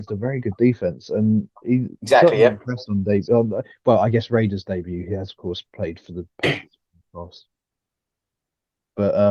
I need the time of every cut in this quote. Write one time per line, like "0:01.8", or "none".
none